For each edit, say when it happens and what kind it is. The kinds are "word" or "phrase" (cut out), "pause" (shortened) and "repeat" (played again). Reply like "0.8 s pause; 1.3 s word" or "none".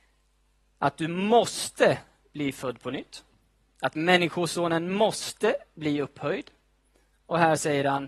none